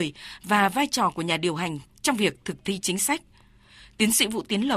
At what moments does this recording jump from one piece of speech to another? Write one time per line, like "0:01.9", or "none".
none